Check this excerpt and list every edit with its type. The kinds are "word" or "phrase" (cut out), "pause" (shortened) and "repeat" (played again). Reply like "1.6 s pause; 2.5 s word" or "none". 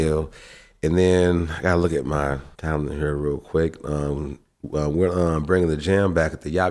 2.5 s pause